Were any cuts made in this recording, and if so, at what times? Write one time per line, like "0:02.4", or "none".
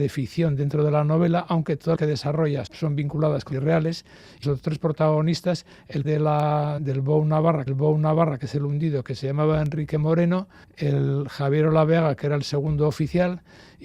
0:02.0
0:02.7
0:03.5
0:04.4
0:06.0
0:06.8
0:07.7
0:10.6